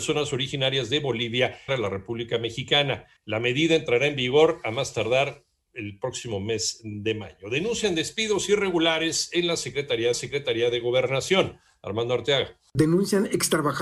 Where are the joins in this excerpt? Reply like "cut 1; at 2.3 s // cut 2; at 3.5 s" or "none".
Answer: cut 1; at 1.7 s // cut 2; at 3.2 s // cut 3; at 10.1 s